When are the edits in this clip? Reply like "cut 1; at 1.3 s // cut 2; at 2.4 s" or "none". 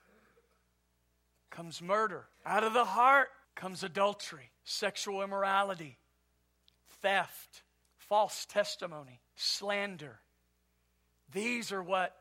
cut 1; at 2.3 s // cut 2; at 3.4 s // cut 3; at 4.6 s // cut 4; at 7.8 s // cut 5; at 9.3 s